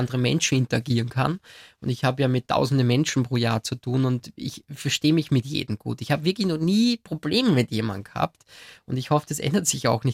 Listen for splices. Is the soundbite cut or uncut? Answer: uncut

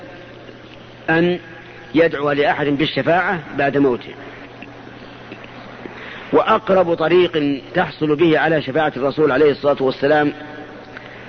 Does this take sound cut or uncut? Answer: uncut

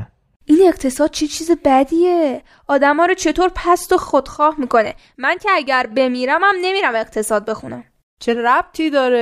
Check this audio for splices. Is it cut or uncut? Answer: uncut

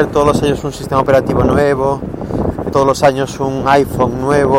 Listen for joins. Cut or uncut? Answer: cut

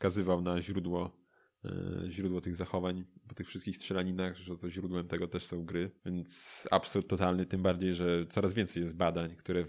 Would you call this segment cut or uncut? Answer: cut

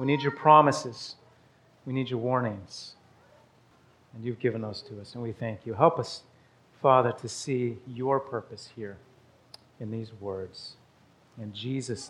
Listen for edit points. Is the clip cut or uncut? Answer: uncut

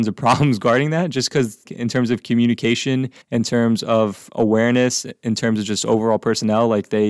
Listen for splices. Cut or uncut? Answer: cut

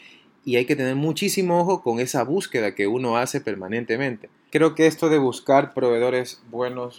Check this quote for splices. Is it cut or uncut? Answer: uncut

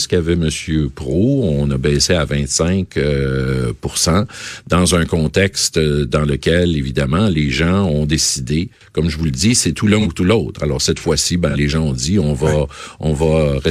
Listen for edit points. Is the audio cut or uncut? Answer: uncut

